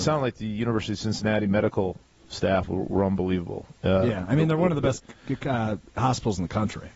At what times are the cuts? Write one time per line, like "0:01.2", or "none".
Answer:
none